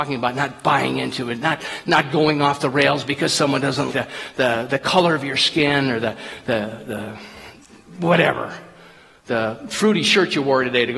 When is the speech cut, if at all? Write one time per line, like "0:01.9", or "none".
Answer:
0:03.9